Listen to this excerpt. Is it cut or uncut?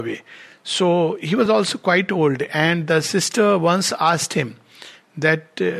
uncut